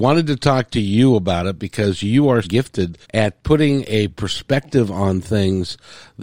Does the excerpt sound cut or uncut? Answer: cut